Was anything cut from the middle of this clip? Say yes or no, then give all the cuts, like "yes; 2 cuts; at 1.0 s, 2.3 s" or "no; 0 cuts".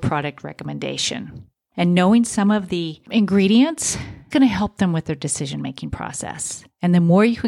yes; 1 cut; at 4.3 s